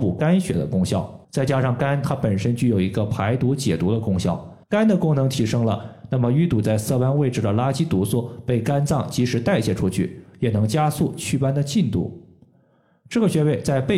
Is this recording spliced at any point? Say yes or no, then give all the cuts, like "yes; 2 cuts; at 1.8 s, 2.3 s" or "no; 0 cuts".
yes; 2 cuts; at 1.2 s, 4.6 s